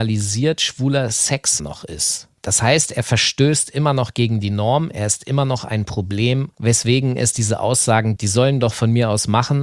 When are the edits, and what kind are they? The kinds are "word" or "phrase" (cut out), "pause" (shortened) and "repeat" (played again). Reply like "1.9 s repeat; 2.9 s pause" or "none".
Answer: 1.6 s word; 8.2 s word